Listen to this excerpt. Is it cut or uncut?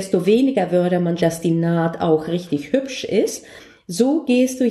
cut